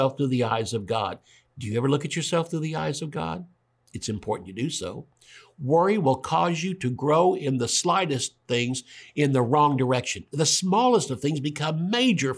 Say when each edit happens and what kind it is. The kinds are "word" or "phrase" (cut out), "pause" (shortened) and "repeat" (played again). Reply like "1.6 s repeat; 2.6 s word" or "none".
none